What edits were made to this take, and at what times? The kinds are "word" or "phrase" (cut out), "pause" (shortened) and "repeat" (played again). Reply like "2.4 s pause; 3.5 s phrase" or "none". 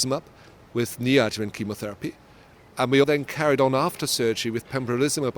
3.0 s word

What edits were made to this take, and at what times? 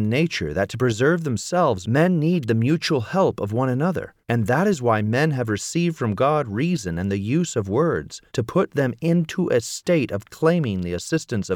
4.2 s pause; 8.3 s pause

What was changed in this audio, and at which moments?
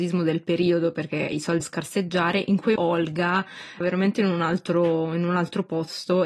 1.6 s word; 2.8 s word; 3.8 s phrase

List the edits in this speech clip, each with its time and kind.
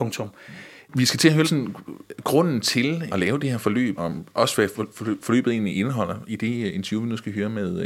1.4 s phrase; 3.1 s word; 4.0 s word

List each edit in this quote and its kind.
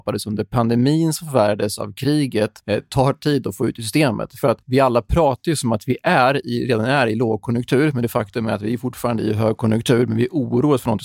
2.6 s pause; 4.6 s pause

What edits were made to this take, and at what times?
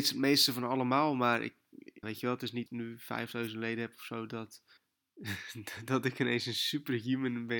2.0 s word; 2.7 s word; 4.8 s pause

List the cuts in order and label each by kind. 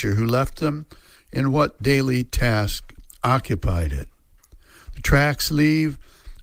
none

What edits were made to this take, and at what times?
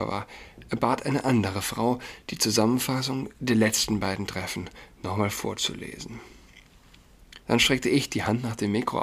7.4 s pause

